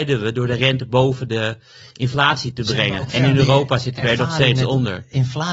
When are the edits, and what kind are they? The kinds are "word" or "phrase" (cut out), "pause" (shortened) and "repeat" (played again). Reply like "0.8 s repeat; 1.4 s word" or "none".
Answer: none